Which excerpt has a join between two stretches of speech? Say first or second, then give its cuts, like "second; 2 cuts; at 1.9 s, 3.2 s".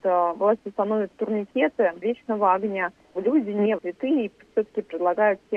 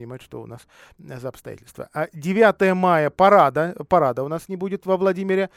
first; 3 cuts; at 2.0 s, 3.1 s, 3.8 s